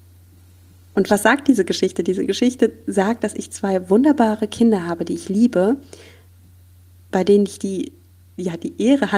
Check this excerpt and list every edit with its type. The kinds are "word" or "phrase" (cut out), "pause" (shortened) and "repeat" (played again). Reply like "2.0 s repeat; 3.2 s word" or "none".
none